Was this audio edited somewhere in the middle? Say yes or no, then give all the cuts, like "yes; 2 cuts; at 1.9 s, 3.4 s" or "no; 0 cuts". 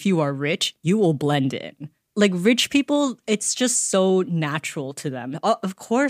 no; 0 cuts